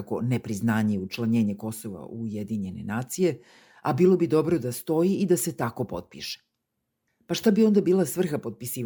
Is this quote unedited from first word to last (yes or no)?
yes